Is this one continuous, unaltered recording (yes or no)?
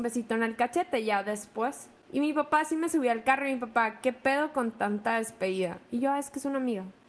yes